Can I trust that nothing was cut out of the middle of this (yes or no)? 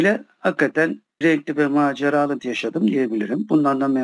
no